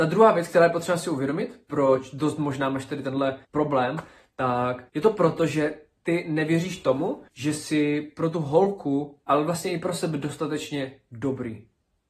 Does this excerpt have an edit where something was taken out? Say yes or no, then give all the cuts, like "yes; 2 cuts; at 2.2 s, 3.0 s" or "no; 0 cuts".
yes; 3 cuts; at 3.4 s, 4.9 s, 7.3 s